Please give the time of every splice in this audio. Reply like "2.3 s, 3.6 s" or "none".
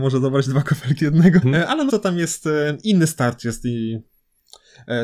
1.0 s, 1.4 s, 1.9 s